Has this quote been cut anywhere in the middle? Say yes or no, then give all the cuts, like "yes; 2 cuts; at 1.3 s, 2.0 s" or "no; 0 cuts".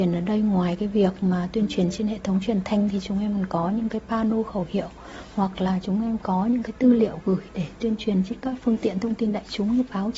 no; 0 cuts